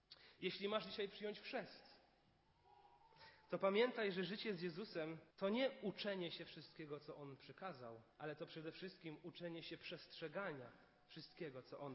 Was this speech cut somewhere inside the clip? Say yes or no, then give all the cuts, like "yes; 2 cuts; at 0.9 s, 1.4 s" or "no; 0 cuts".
yes; 2 cuts; at 5.3 s, 8.1 s